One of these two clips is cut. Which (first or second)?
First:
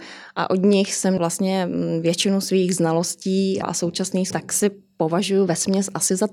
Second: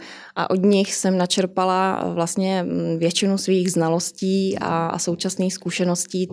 first